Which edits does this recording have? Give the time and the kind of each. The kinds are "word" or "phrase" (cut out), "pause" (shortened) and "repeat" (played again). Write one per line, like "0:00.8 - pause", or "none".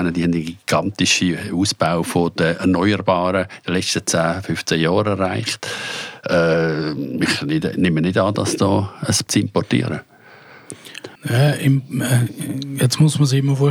0:09.3 - phrase
0:11.2 - pause